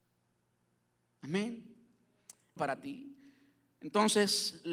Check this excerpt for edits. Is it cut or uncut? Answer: cut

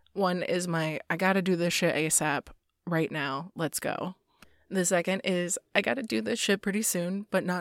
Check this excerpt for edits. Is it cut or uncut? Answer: uncut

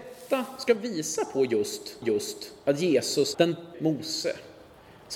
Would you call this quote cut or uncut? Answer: cut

